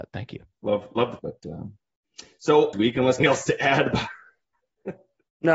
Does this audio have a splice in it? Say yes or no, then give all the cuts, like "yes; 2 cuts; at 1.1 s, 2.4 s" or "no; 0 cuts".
yes; 3 cuts; at 1.2 s, 2.7 s, 3.2 s